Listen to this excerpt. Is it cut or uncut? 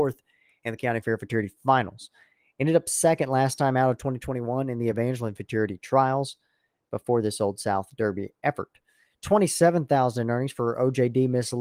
uncut